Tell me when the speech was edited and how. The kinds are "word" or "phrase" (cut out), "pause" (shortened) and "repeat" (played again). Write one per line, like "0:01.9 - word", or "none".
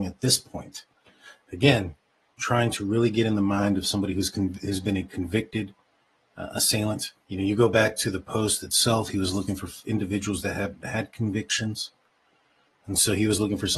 0:07.2 - pause